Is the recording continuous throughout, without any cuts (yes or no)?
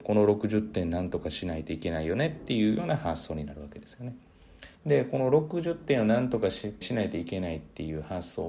no